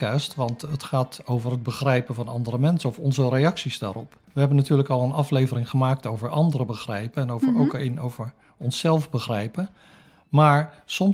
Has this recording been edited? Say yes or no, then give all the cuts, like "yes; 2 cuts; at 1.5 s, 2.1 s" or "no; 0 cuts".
yes; 1 cut; at 4.2 s